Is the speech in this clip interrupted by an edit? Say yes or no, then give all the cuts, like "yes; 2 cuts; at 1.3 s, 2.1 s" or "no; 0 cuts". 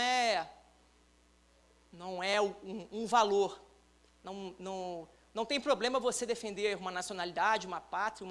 no; 0 cuts